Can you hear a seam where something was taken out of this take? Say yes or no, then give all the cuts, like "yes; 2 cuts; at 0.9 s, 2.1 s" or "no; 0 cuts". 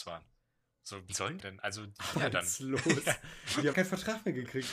yes; 4 cuts; at 1.1 s, 1.4 s, 2.1 s, 3.7 s